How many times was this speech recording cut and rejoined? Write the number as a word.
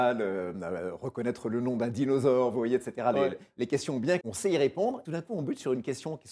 two